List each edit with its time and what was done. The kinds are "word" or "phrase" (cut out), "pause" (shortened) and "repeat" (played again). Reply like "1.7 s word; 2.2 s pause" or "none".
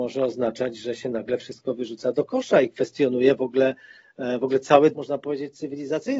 4.9 s word